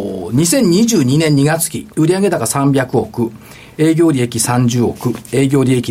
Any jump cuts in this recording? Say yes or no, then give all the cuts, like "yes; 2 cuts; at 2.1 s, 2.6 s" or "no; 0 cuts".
yes; 1 cut; at 1.9 s